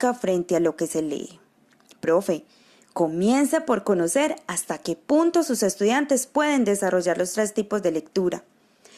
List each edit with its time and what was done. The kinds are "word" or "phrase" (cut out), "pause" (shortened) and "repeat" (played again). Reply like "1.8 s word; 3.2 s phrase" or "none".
none